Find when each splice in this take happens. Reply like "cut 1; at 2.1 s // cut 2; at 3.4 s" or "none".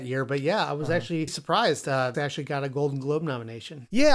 cut 1; at 1.3 s // cut 2; at 2.1 s